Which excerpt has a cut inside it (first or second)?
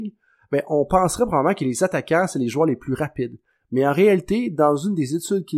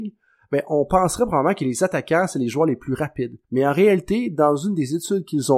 second